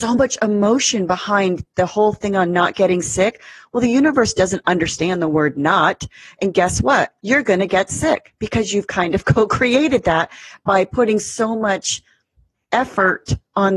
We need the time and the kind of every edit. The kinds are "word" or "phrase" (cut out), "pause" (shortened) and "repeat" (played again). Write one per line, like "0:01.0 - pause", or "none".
0:07.2 - pause